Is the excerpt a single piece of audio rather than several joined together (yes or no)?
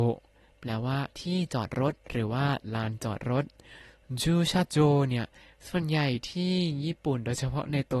yes